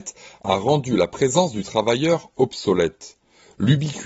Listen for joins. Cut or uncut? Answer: uncut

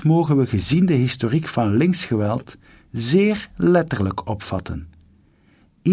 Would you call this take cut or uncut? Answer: uncut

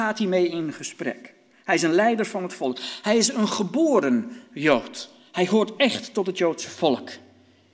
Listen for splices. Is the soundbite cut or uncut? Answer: uncut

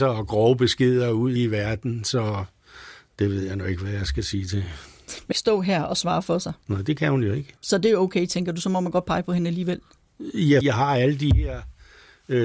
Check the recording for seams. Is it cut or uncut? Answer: cut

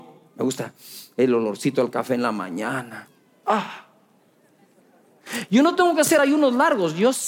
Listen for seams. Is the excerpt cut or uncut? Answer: uncut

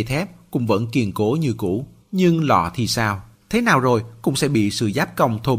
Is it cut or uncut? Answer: cut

